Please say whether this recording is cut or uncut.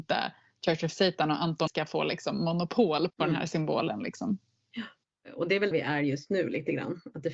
cut